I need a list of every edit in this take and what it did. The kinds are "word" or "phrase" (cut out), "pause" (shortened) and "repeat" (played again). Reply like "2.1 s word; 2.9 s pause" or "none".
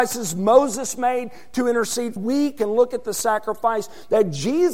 2.2 s phrase